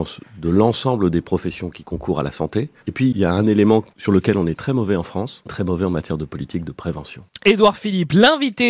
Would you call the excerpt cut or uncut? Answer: cut